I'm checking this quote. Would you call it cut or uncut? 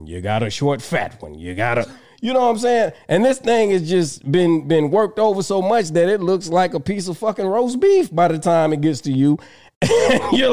uncut